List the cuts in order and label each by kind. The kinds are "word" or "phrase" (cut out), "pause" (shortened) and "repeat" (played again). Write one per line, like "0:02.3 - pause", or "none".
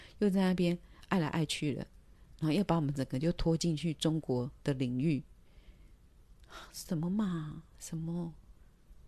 none